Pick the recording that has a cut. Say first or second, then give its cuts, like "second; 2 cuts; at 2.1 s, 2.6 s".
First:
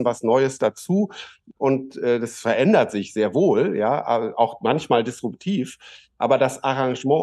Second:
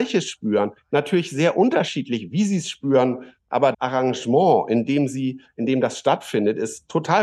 second; 1 cut; at 3.7 s